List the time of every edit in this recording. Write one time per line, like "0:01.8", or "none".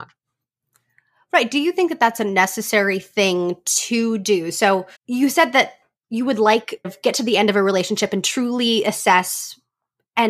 0:04.9
0:06.8